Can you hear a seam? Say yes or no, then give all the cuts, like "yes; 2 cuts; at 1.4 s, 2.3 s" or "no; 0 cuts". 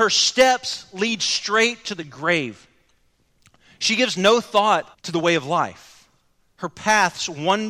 yes; 1 cut; at 4.9 s